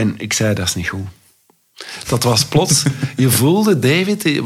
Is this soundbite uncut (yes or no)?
yes